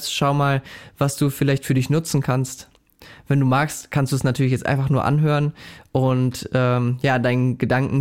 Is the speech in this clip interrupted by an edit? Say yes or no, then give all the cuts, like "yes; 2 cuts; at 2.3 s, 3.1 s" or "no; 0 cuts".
no; 0 cuts